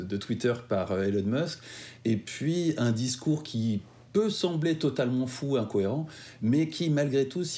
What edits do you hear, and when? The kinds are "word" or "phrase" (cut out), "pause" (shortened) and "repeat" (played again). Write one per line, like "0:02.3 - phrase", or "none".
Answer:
none